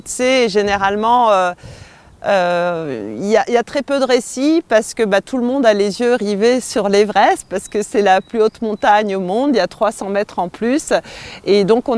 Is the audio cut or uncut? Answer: uncut